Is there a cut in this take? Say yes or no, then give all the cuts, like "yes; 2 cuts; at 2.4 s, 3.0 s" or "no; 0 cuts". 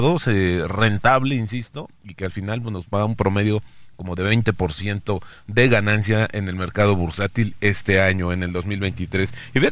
no; 0 cuts